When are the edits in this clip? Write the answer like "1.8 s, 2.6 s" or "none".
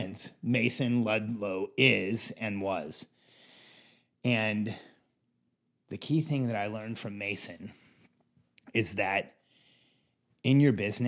none